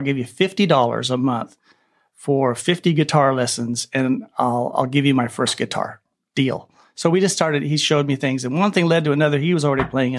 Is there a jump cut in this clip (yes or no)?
no